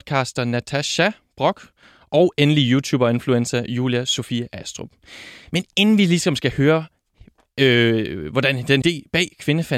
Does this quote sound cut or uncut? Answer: cut